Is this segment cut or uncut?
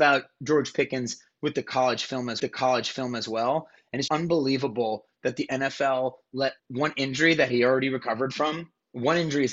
cut